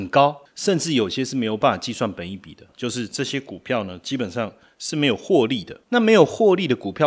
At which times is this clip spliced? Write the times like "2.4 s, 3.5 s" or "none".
none